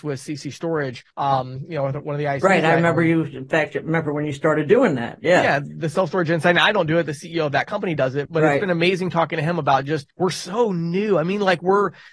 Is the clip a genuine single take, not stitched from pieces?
no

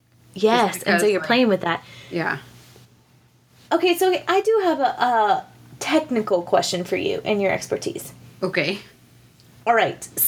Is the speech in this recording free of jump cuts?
yes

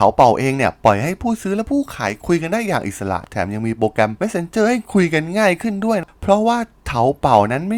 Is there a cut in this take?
no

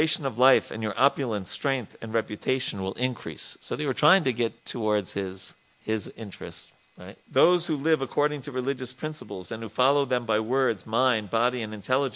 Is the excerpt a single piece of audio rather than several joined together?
no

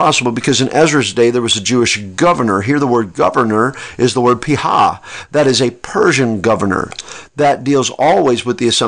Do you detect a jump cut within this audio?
no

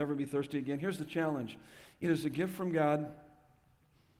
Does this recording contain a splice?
no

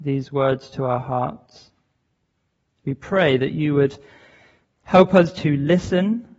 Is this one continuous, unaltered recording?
yes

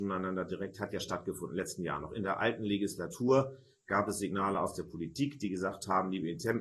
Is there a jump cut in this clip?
no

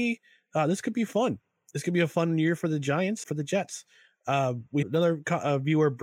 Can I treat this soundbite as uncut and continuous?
no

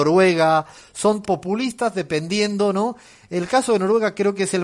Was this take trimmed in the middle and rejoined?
yes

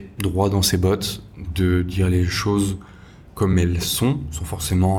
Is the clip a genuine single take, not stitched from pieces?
yes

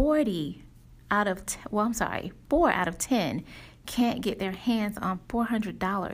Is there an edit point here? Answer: yes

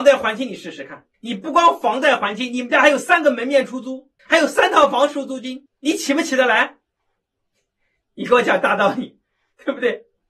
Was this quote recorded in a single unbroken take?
no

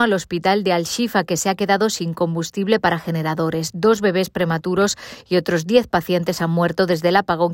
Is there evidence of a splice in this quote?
no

